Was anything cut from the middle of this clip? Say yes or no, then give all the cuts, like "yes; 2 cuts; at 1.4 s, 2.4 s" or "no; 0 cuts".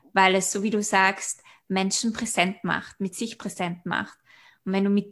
no; 0 cuts